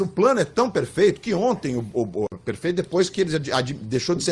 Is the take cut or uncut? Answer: uncut